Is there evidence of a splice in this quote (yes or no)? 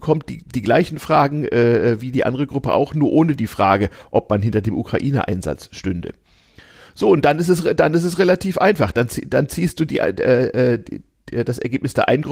no